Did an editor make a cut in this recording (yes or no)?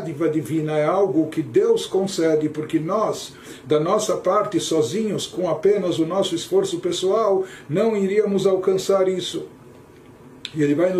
no